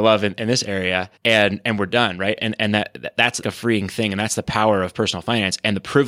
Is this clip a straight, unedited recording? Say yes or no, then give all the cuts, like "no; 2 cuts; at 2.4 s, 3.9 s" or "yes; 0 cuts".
no; 3 cuts; at 1.2 s, 2.4 s, 3.4 s